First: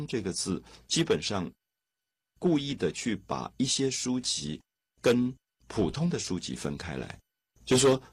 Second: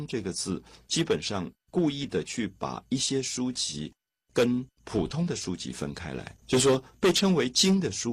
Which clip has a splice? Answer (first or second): second